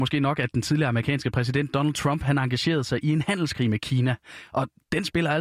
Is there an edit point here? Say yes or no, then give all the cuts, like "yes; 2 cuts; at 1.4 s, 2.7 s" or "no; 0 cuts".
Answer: no; 0 cuts